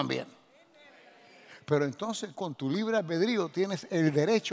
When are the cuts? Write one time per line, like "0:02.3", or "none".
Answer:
0:02.3